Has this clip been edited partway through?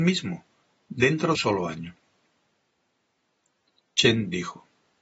yes; 1 cut; at 1.3 s

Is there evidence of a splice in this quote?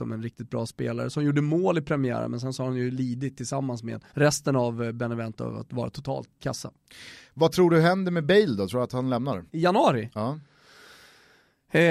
yes; 3 cuts; at 4.1 s, 6.4 s, 9.5 s

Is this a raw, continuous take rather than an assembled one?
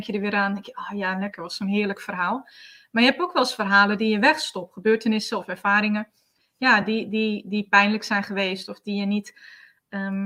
yes; 0 cuts

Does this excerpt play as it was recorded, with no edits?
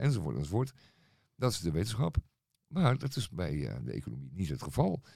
yes; 0 cuts

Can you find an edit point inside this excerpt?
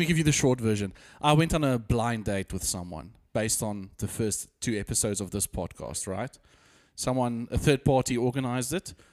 no; 0 cuts

